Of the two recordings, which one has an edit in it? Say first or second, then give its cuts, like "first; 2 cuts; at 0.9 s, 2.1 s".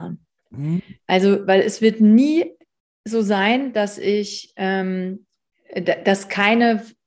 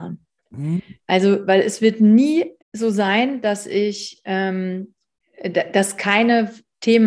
second; 1 cut; at 2.6 s